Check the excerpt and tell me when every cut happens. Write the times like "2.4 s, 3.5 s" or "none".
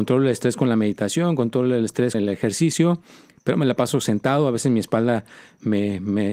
2.1 s